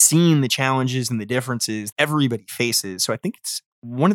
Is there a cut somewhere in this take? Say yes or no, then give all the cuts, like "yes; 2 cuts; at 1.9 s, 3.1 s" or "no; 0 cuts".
yes; 1 cut; at 1.9 s